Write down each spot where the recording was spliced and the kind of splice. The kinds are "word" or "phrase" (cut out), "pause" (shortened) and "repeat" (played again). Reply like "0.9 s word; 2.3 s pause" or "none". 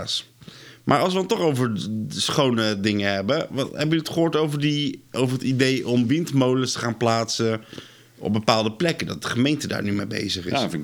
none